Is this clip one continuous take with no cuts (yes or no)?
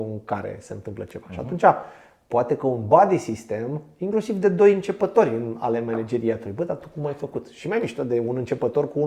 yes